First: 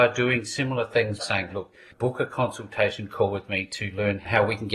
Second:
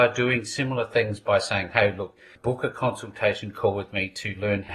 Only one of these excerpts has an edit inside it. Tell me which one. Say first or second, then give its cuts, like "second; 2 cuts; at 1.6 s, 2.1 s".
first; 2 cuts; at 1.2 s, 1.5 s